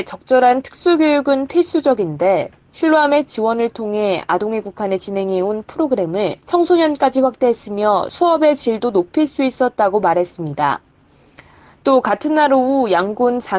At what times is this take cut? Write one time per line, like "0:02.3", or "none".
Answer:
0:06.4

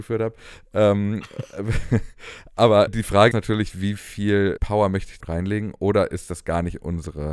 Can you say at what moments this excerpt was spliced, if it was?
0:02.9
0:03.3
0:04.6
0:05.2

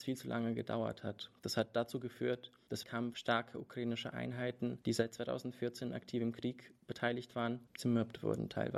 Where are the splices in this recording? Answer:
0:02.8

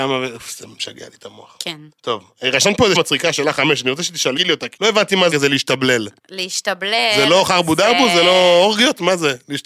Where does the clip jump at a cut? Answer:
0:01.9
0:02.9
0:04.4
0:04.8
0:05.3
0:06.2

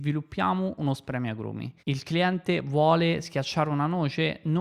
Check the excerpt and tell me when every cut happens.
0:01.8

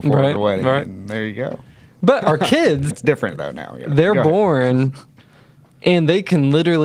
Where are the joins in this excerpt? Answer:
0:02.9

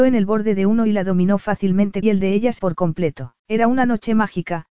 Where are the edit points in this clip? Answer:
0:02.0
0:02.6
0:03.4

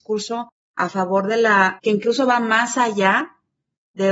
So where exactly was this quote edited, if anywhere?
0:01.8

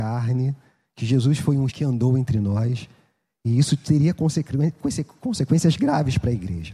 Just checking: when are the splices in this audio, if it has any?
0:01.7

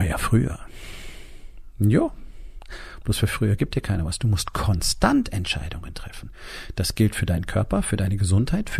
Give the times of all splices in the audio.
none

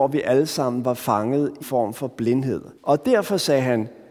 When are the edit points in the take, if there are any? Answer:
0:01.6
0:02.8

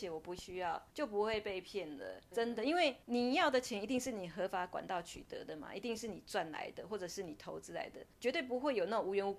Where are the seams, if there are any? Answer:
0:00.9
0:02.3
0:03.0
0:08.1

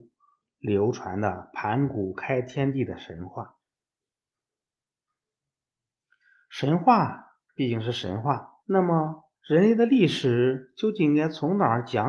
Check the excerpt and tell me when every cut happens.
0:07.5
0:08.6
0:09.4

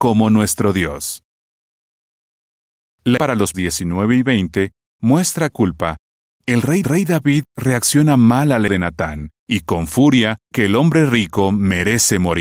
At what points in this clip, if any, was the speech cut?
0:03.2
0:03.5
0:05.5
0:06.8
0:08.7
0:09.4
0:10.5

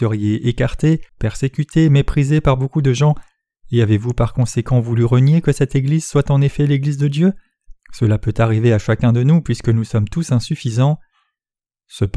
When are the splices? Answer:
0:01.1
0:07.8

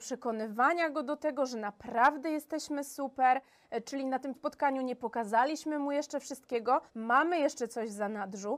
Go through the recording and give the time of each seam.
0:04.3
0:06.9

